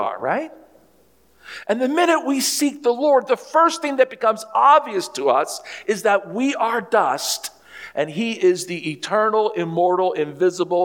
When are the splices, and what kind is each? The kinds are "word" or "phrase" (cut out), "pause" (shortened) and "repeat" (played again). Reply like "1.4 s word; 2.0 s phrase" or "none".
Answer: none